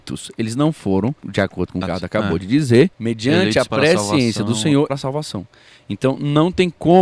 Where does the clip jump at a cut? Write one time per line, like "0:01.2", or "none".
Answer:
0:01.2
0:01.8
0:02.9
0:04.9